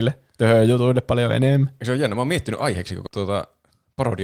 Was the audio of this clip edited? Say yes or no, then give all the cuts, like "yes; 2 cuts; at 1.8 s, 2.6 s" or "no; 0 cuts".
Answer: yes; 1 cut; at 3.1 s